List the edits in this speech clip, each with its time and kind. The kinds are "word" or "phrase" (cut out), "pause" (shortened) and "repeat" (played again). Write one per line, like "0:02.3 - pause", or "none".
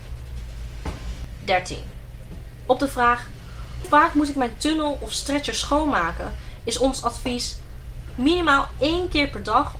0:03.8 - word

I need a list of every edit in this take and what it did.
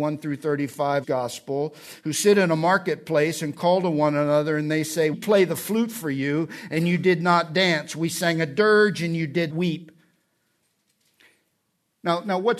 0:01.0 - word
0:05.1 - word
0:09.5 - word

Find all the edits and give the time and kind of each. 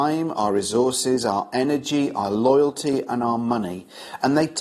none

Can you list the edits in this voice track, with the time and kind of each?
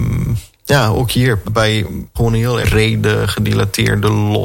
0:01.4 - word
0:02.2 - phrase
0:02.6 - word

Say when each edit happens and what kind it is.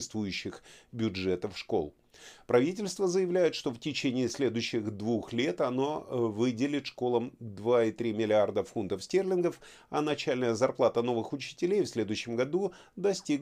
none

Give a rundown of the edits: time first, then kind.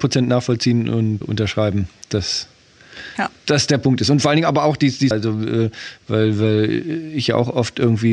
0:01.2 - word
0:05.1 - word

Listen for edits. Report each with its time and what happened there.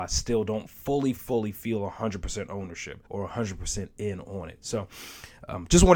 0:01.2 - word
0:03.0 - pause

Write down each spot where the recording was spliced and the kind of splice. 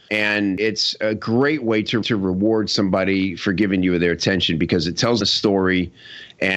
0:02.0 - repeat
0:05.2 - word

